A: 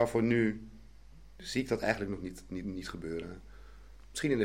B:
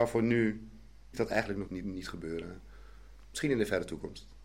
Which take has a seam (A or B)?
B